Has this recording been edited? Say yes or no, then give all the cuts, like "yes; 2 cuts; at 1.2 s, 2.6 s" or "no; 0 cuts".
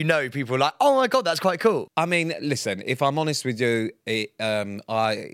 no; 0 cuts